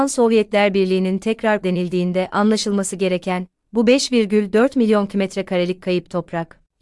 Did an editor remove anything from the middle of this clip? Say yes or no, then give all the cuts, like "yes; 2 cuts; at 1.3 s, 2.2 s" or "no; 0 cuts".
yes; 1 cut; at 1.6 s